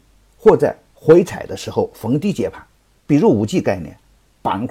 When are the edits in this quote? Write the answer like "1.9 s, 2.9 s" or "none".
none